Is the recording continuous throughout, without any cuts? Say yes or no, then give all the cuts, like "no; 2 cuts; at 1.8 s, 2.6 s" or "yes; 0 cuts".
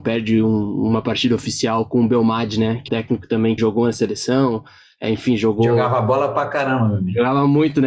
no; 2 cuts; at 2.9 s, 3.6 s